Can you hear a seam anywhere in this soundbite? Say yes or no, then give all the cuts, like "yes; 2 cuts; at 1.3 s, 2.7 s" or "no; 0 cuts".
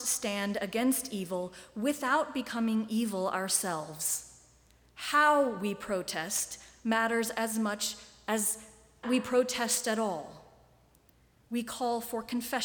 yes; 1 cut; at 9.0 s